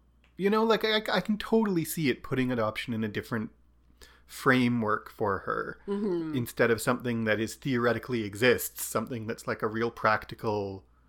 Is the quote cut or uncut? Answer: uncut